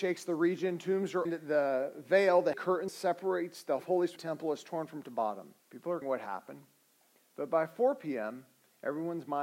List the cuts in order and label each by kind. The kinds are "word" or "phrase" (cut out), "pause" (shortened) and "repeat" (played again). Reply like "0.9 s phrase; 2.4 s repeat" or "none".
1.3 s phrase; 2.5 s word; 2.9 s word; 3.8 s word; 4.2 s phrase; 5.0 s word; 5.6 s pause; 6.0 s phrase